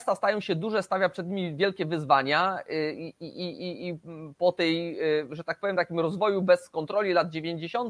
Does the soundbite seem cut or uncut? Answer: uncut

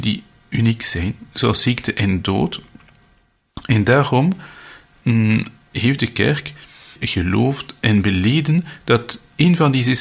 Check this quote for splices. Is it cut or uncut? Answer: uncut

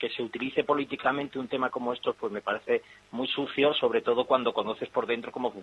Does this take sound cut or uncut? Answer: uncut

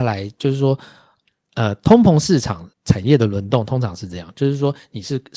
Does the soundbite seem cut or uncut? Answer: cut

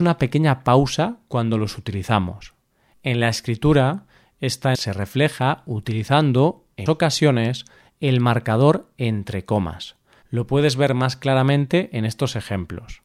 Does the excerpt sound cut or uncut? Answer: cut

